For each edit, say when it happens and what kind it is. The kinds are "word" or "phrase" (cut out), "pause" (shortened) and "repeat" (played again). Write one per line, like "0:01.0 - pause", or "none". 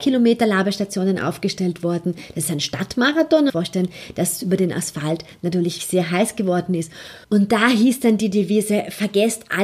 0:03.5 - phrase
0:05.8 - word
0:07.2 - pause